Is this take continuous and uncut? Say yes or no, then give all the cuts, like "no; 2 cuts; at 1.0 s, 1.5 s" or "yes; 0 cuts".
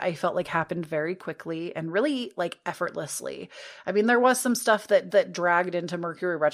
no; 1 cut; at 5.1 s